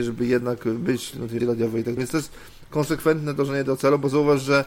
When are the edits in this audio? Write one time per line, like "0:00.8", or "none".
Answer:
0:01.4
0:02.0